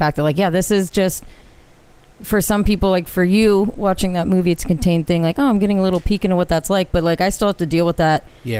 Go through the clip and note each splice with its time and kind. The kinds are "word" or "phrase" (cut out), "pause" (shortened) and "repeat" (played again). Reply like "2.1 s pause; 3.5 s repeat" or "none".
none